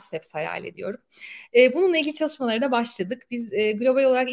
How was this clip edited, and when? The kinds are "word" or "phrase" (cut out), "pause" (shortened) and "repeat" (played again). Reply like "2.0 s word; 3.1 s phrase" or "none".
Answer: none

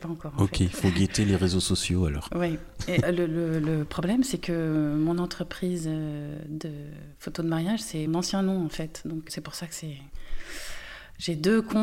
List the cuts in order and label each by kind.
3.0 s word; 8.1 s word; 9.3 s word

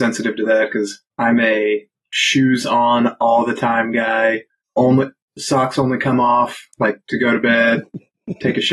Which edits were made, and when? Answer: 1.1 s pause; 4.6 s pause

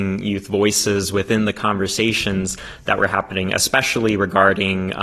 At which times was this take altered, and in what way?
none

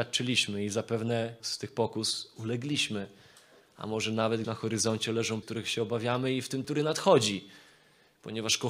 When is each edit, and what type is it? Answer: 1.4 s word; 4.4 s word; 5.4 s word; 6.6 s word

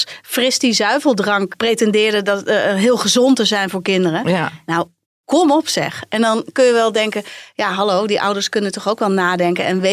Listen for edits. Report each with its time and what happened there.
none

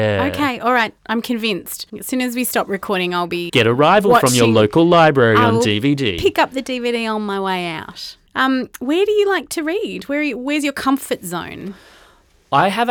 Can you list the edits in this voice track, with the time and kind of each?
1.0 s pause; 1.9 s pause; 3.5 s word; 8.3 s pause

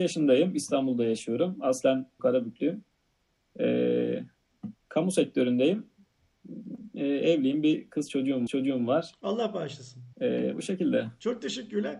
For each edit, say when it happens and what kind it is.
2.2 s word; 4.8 s pause; 8.5 s repeat; 10.1 s pause

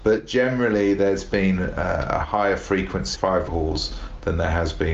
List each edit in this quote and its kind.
3.1 s word; 3.5 s word

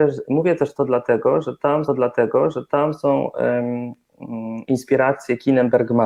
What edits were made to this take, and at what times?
1.9 s repeat

